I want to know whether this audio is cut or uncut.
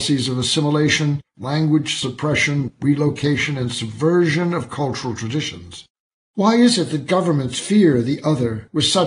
uncut